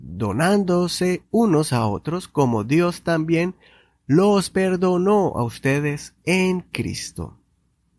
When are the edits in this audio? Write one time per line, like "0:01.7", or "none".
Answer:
none

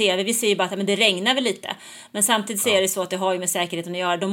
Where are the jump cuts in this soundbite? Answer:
none

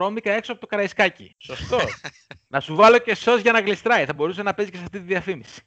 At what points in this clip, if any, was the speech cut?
none

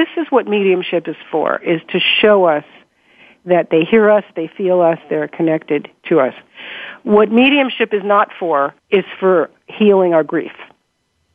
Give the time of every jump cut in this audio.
0:08.8

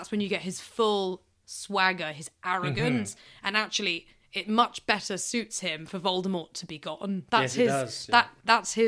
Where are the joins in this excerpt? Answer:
none

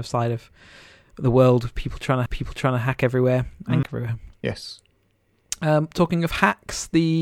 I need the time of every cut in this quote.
0:02.3
0:03.8

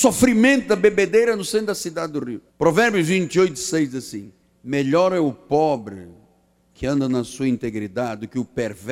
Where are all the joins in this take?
0:02.5
0:04.4

